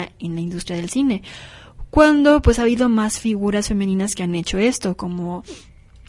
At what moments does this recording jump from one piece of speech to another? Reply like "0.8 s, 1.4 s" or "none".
none